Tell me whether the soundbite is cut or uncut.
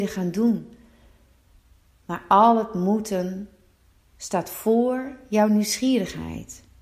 uncut